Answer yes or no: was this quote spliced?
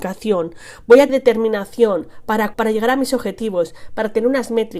yes